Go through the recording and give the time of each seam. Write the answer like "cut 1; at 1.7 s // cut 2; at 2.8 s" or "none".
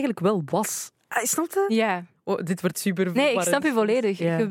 cut 1; at 2.7 s